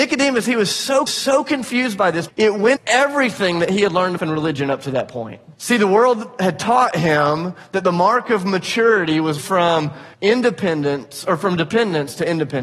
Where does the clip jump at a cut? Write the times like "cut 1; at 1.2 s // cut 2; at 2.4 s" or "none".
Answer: cut 1; at 1.1 s // cut 2; at 2.3 s // cut 3; at 2.8 s // cut 4; at 4.2 s // cut 5; at 5.5 s // cut 6; at 9.4 s // cut 7; at 10.1 s